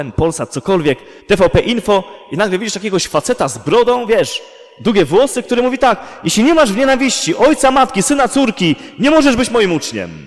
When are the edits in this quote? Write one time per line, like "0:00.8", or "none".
0:01.2